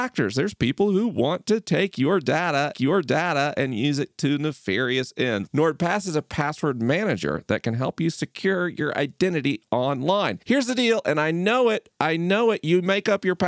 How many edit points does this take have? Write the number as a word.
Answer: two